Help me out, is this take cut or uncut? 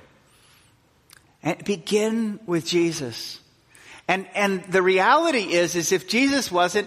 uncut